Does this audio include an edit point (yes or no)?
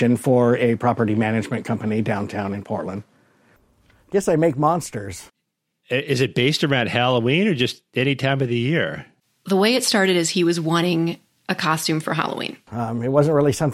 no